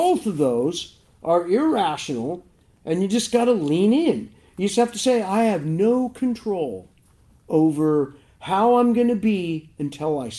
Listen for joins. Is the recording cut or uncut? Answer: uncut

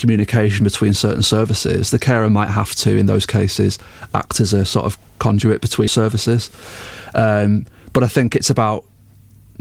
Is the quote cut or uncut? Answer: cut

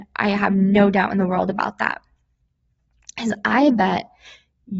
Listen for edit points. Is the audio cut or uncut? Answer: uncut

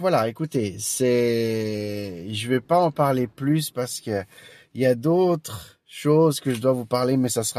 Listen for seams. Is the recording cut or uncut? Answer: uncut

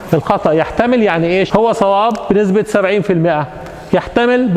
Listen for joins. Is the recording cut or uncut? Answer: cut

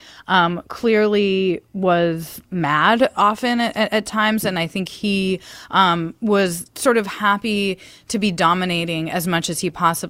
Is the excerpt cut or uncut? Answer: uncut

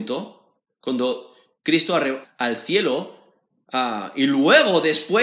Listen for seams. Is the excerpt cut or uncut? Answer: cut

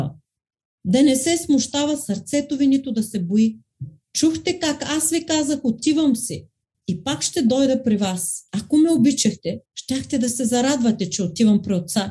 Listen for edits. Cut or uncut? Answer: cut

